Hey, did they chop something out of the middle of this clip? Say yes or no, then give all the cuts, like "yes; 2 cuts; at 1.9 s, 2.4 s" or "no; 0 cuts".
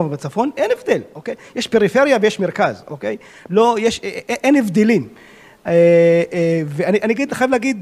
no; 0 cuts